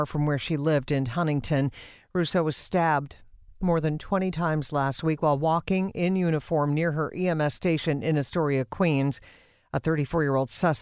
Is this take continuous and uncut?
yes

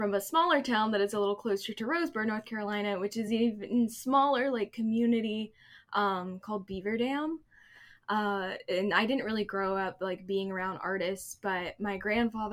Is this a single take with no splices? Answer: yes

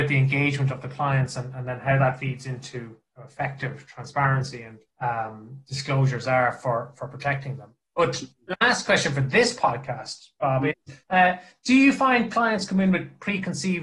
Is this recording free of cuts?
no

